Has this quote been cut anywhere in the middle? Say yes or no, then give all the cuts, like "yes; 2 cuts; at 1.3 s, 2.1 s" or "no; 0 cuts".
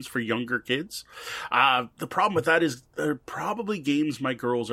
no; 0 cuts